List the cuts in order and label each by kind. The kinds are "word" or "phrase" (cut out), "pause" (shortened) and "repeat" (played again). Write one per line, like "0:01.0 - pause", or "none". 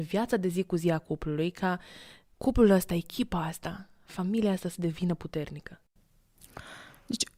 none

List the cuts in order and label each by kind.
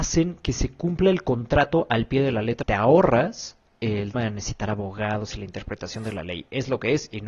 0:02.6 - phrase
0:04.1 - word

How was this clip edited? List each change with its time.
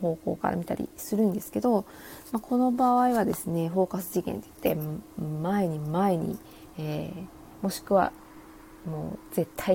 none

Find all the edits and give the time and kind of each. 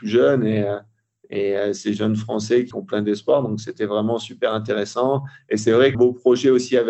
0:02.7 - phrase
0:05.9 - phrase

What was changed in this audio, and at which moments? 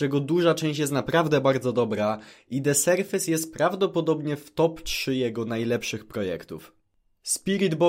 none

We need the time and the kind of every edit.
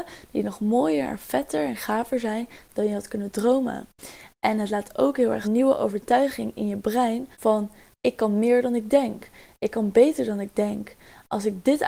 0:05.4 - phrase
0:07.3 - pause

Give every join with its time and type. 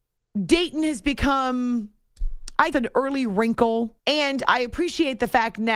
0:02.7 - word
0:04.0 - pause

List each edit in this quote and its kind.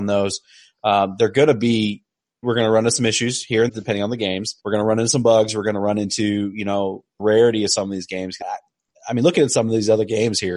0:02.4 - word
0:03.7 - word
0:04.6 - pause
0:07.2 - word
0:08.4 - word

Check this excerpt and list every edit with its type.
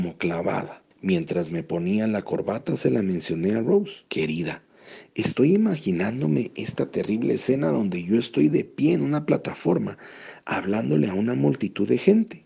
0:00.9 - pause
0:04.1 - pause

